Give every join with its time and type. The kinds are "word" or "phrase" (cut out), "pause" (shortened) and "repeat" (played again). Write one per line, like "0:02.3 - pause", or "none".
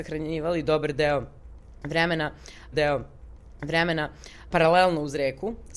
0:02.7 - repeat